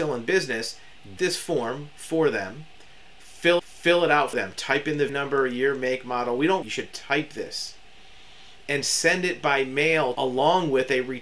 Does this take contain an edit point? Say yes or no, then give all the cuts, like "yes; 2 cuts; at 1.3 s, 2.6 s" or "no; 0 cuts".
yes; 6 cuts; at 1.2 s, 3.6 s, 4.3 s, 5.1 s, 6.6 s, 10.2 s